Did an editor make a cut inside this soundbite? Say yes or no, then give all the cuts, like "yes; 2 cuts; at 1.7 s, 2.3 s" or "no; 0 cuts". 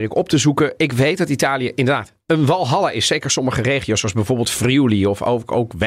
no; 0 cuts